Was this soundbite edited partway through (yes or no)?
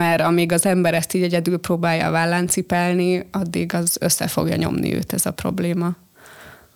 no